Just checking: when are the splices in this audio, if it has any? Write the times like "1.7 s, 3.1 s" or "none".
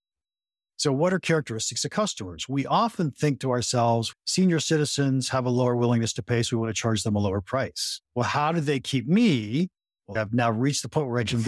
4.1 s, 8.0 s, 10.2 s